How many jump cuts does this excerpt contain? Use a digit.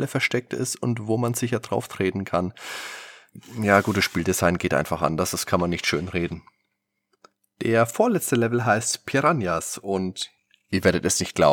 0